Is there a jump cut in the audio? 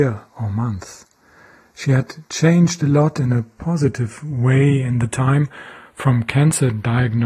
no; 0 cuts

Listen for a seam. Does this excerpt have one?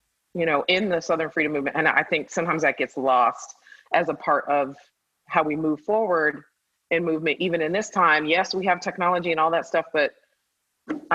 no; 0 cuts

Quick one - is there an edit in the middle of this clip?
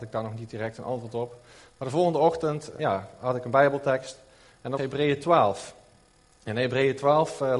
yes; 2 cuts; at 2.8 s, 4.8 s

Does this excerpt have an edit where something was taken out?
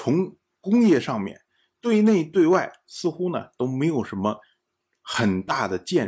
no; 0 cuts

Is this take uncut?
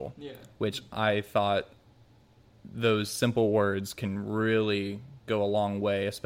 yes; 0 cuts

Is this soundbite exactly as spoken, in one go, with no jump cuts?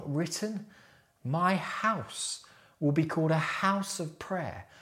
yes; 0 cuts

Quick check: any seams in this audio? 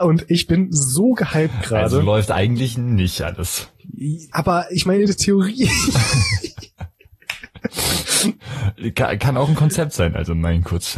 no; 0 cuts

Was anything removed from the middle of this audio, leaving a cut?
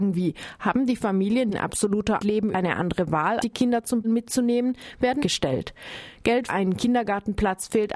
yes; 7 cuts; at 1.5 s, 2.2 s, 2.5 s, 3.4 s, 4.0 s, 5.2 s, 6.5 s

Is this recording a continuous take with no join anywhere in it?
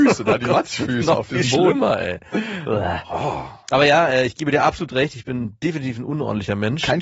yes; 0 cuts

